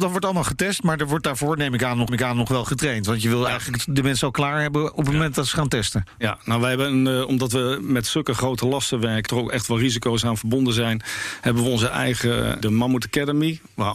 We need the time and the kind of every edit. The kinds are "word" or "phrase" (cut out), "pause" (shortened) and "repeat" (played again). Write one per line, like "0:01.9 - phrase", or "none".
0:02.1 - repeat
0:09.3 - word
0:12.6 - word